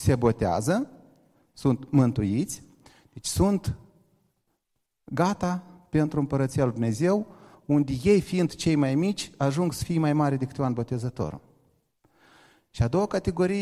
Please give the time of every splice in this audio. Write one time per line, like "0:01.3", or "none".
none

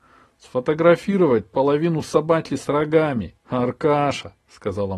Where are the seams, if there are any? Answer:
0:03.4

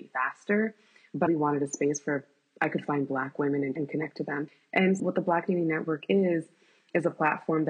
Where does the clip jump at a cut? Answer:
0:01.3
0:03.8
0:05.0

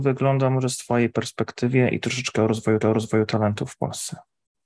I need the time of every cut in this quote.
0:02.8

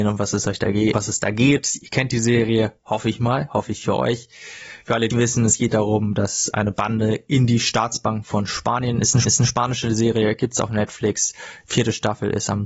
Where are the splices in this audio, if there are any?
0:00.9
0:05.1
0:09.2

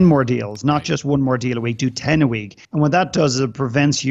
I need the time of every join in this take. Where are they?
0:02.6

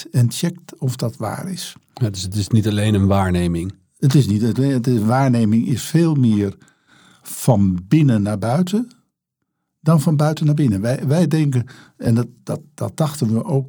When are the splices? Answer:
none

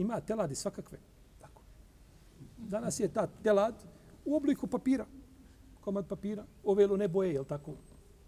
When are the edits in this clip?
none

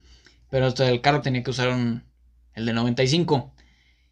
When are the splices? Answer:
0:01.2

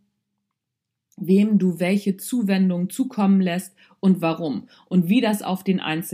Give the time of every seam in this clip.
none

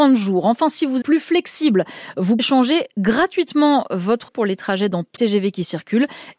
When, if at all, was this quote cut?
0:01.0
0:02.4
0:04.3
0:05.2

